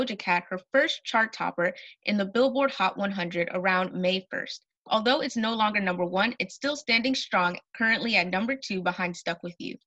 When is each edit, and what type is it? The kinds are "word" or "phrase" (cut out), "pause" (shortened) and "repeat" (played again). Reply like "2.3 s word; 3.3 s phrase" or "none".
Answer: none